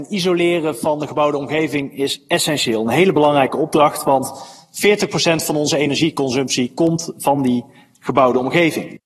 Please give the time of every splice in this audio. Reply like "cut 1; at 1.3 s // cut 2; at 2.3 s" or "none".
none